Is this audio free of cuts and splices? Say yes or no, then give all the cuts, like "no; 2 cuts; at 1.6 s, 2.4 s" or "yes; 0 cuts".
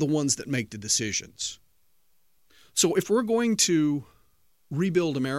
yes; 0 cuts